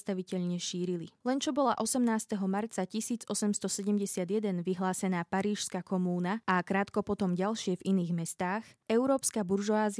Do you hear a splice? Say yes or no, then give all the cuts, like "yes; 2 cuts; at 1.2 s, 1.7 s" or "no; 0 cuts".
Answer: no; 0 cuts